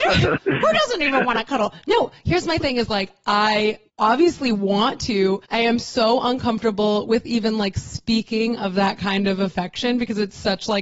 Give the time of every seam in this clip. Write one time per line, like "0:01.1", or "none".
0:03.9
0:05.4